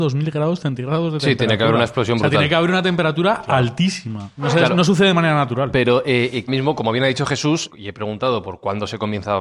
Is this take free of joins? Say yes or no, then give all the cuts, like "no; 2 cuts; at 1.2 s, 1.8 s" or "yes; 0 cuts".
no; 2 cuts; at 6.5 s, 7.7 s